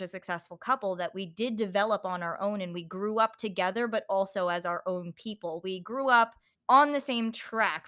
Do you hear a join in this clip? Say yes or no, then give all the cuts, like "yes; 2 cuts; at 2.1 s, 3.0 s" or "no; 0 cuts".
yes; 1 cut; at 6.5 s